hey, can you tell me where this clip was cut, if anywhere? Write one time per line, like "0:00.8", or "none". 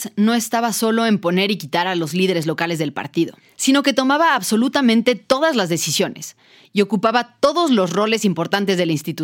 none